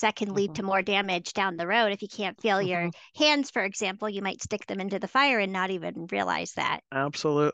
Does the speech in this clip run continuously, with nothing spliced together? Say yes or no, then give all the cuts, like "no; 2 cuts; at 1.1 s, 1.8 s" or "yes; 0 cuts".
yes; 0 cuts